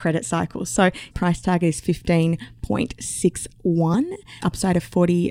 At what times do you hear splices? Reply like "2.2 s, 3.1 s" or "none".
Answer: 1.1 s, 4.4 s